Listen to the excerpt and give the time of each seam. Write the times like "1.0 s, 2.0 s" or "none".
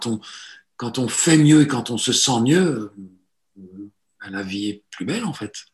none